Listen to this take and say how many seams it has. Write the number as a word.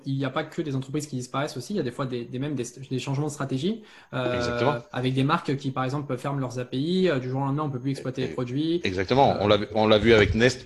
one